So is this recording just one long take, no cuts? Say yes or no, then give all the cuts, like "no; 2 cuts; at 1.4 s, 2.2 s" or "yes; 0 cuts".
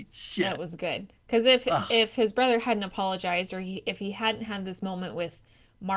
no; 1 cut; at 1.2 s